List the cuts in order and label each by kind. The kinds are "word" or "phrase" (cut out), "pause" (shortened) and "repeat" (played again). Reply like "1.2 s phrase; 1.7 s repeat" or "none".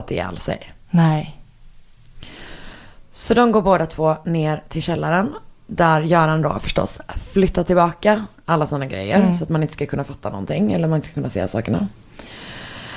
none

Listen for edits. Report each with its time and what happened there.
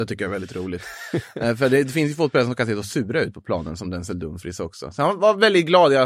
none

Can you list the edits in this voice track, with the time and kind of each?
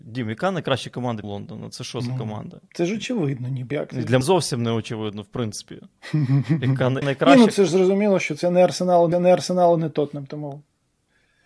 1.2 s word; 3.7 s word; 4.2 s word; 7.0 s word; 9.1 s repeat

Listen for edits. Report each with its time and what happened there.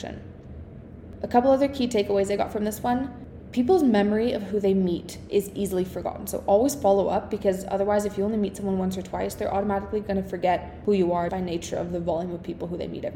11.3 s word

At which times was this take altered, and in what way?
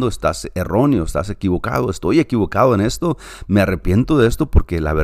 none

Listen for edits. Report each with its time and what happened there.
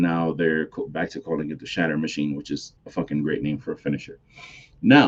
2.8 s pause

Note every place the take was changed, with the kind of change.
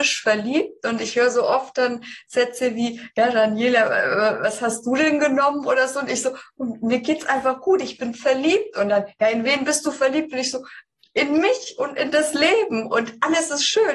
none

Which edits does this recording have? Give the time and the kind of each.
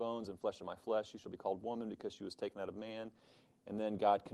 none

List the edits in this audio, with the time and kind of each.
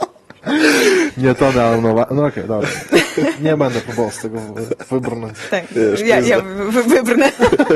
none

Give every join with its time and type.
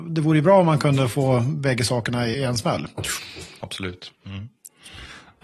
2.3 s word; 4.2 s pause

